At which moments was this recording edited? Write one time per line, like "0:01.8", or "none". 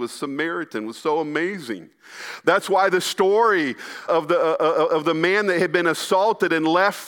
0:04.1